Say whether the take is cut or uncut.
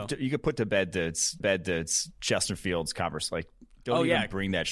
cut